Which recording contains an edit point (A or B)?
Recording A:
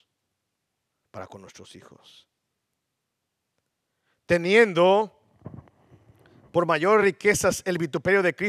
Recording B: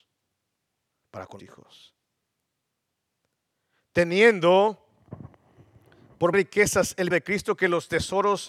B